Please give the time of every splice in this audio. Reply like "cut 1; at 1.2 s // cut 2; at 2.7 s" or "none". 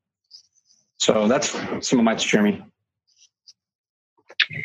cut 1; at 2.2 s